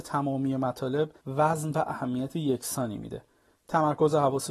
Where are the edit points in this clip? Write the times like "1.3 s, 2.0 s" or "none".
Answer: 1.2 s